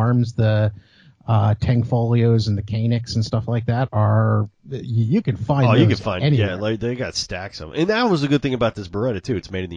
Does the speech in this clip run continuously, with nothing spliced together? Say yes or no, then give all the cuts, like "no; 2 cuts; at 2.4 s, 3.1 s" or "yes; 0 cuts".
yes; 0 cuts